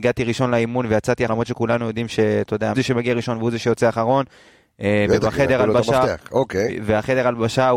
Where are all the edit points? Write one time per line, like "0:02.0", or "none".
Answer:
0:01.3
0:02.7